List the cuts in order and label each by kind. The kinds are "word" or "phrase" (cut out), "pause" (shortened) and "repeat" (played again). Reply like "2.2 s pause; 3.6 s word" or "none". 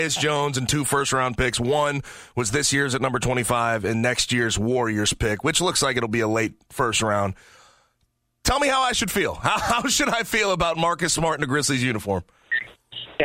none